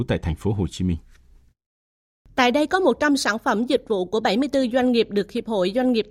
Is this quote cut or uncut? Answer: uncut